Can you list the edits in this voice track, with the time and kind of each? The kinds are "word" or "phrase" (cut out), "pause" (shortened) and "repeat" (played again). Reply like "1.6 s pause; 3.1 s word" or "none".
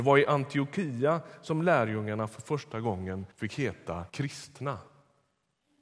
3.3 s pause; 4.1 s pause